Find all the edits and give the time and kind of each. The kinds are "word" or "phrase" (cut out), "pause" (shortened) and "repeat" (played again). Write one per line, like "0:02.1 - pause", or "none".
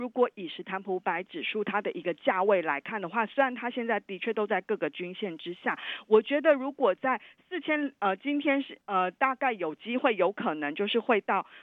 0:08.8 - pause